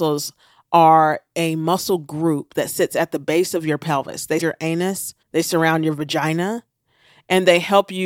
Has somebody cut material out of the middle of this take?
yes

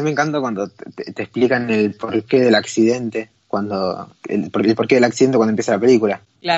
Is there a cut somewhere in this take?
no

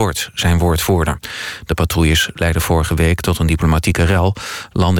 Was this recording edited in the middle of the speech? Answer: no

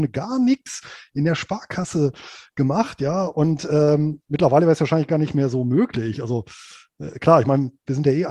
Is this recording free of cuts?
yes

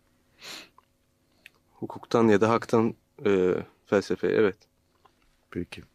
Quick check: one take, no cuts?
yes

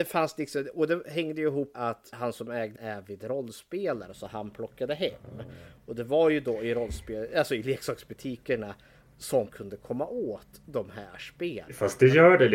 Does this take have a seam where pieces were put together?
yes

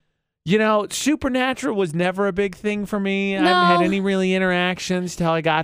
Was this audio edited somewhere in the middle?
no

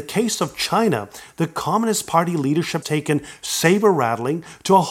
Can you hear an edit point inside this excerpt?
yes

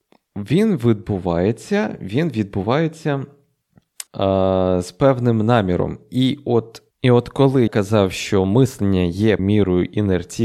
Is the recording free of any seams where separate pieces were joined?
no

